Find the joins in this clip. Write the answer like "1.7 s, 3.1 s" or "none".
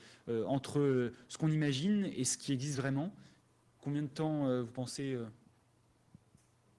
none